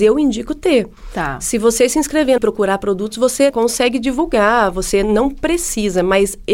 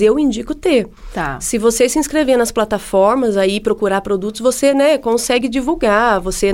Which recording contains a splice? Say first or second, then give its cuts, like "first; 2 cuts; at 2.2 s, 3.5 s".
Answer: first; 2 cuts; at 2.4 s, 3.5 s